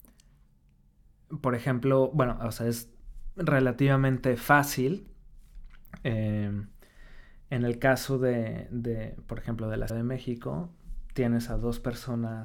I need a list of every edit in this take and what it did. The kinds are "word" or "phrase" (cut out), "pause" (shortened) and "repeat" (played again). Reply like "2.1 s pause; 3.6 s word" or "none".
9.9 s word